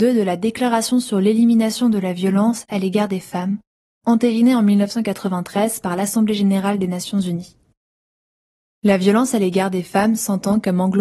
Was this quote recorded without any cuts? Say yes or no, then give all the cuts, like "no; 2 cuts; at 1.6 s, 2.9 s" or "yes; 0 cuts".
yes; 0 cuts